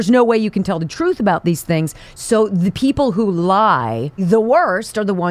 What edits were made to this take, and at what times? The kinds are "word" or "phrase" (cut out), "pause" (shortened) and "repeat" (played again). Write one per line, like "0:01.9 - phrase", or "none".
0:04.2 - word